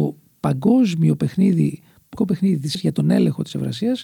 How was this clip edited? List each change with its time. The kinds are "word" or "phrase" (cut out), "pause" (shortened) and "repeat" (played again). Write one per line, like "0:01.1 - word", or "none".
0:02.2 - word
0:02.7 - word